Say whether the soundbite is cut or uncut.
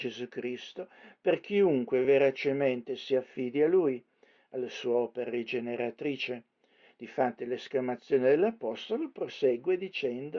uncut